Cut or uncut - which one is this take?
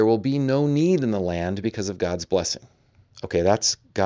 uncut